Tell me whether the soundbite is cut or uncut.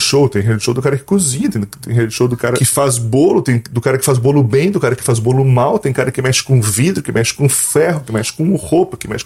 uncut